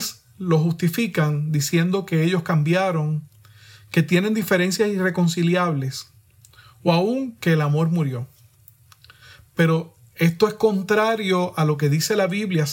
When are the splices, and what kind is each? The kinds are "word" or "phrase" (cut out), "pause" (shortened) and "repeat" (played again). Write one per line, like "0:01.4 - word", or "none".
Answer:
none

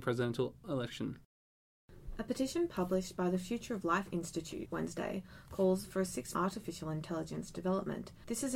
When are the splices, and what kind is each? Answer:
0:04.7 - word
0:06.3 - phrase

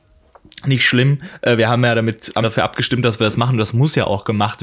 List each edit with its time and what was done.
0:02.4 - word

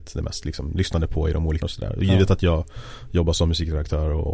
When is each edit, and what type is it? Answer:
0:01.6 - word

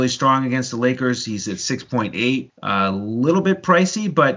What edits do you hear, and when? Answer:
0:02.5 - word

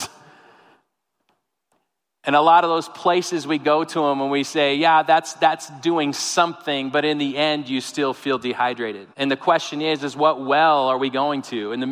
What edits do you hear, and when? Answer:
0:09.1 - pause

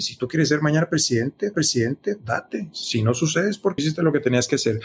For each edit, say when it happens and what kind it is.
0:01.5 - repeat
0:03.8 - word

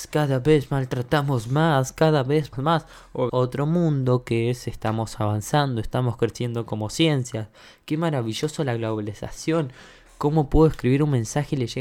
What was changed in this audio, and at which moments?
0:02.5 - word
0:03.3 - word

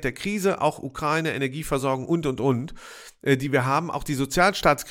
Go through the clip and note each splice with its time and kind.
none

